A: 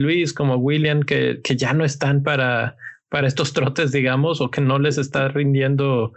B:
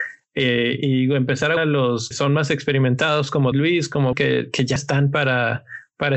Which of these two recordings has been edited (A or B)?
B